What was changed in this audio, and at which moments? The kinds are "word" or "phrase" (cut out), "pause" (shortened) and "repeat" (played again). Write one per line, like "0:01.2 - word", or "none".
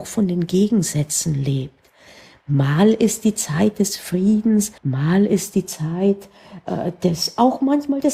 0:04.8 - pause